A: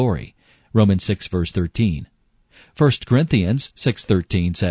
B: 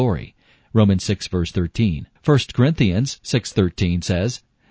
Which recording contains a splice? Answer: B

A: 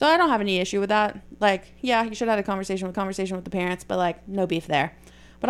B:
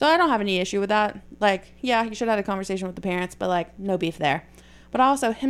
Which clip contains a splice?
A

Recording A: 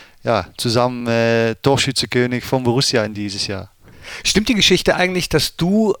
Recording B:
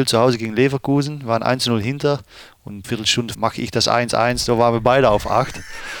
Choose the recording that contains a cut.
B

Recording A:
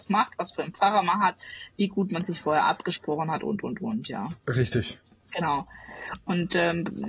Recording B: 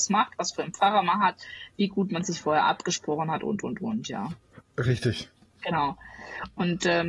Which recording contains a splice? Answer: A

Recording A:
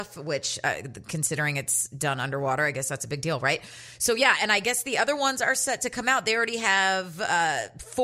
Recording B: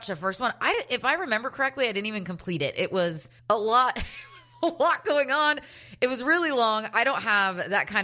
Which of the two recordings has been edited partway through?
B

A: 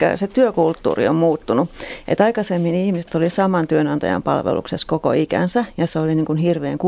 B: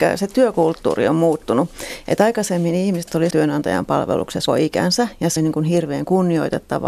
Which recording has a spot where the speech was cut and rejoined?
B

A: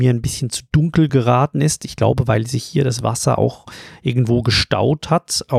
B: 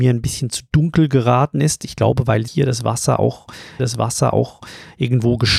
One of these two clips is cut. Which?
B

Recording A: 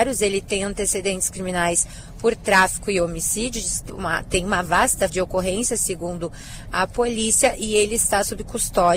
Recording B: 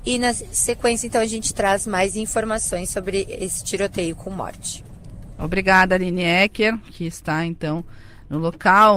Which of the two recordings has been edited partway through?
A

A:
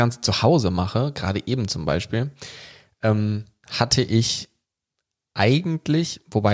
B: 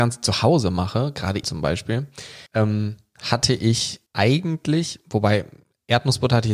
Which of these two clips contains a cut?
B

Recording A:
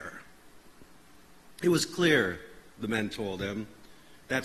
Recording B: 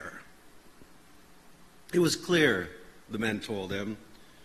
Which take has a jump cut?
A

